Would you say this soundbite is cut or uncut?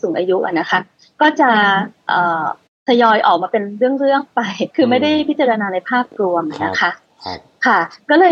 cut